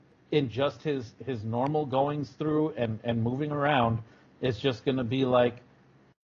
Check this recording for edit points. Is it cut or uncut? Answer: uncut